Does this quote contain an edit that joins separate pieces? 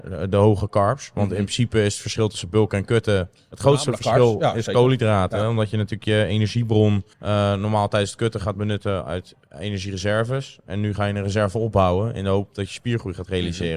yes; 1 cut; at 7.1 s

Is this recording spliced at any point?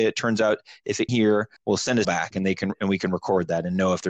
yes; 3 cuts; at 1.1 s, 1.6 s, 2.0 s

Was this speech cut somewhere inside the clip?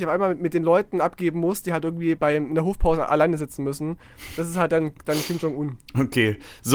yes; 1 cut; at 2.2 s

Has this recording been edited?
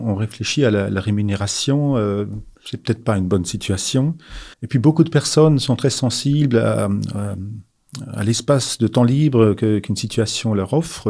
yes; 2 cuts; at 2.5 s, 4.5 s

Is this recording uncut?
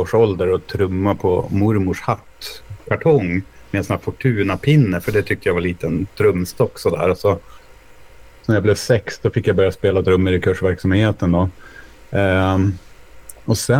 yes; 0 cuts

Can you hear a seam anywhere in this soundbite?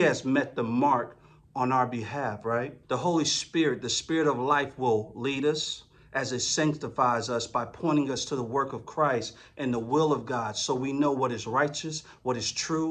yes; 1 cut; at 2.8 s

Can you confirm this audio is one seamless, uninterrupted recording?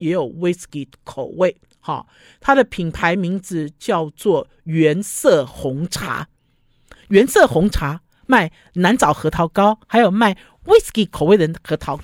yes; 0 cuts

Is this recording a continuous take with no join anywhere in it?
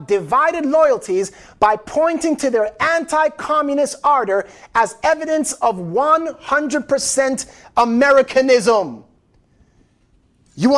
yes; 0 cuts

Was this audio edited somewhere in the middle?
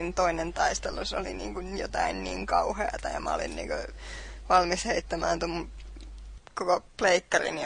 yes; 1 cut; at 6.4 s

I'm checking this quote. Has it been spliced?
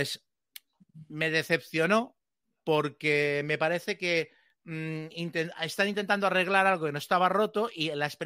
no; 0 cuts

